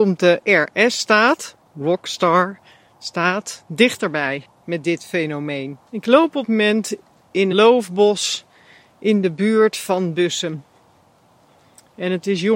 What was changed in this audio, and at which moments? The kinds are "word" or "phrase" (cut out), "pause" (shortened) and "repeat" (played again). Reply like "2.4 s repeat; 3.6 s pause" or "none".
4.5 s pause; 5.9 s pause; 6.4 s word; 7.5 s word